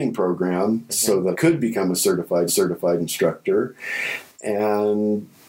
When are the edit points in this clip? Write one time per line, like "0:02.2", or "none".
0:01.3
0:02.5